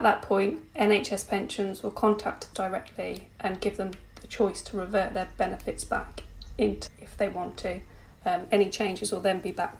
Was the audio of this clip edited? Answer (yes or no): yes